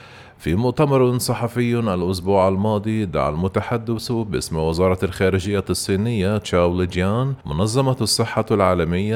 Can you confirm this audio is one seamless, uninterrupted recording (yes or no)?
no